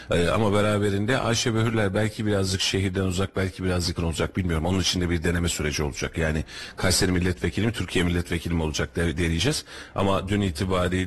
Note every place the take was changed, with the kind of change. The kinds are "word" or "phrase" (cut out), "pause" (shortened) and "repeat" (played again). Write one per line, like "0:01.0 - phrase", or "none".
0:04.0 - word

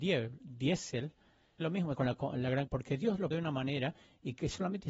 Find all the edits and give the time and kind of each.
0:01.6 - word
0:01.9 - word
0:02.7 - word
0:03.3 - word

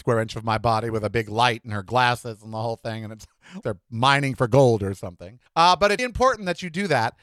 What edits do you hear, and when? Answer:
0:03.6 - word
0:05.5 - pause
0:06.0 - word

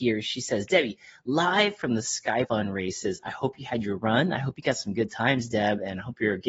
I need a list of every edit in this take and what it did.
0:02.4 - word

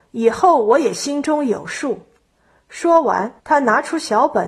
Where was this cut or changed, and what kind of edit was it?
0:03.4 - pause

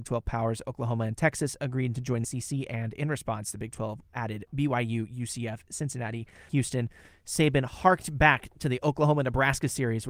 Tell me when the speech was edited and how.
0:02.2 - word
0:06.5 - word

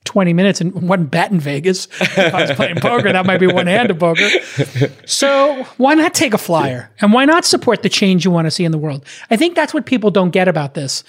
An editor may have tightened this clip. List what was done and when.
none

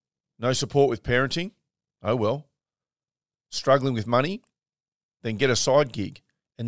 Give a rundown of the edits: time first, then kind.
none

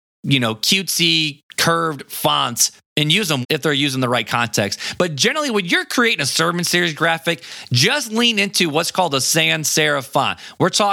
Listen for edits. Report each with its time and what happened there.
0:02.8 - pause
0:03.4 - word

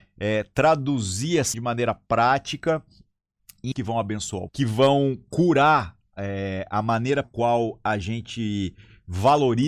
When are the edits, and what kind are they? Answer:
0:01.5 - word
0:03.7 - word
0:04.5 - word
0:07.2 - word

